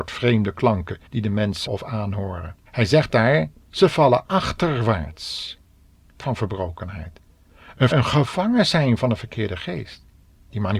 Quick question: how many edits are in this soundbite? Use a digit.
6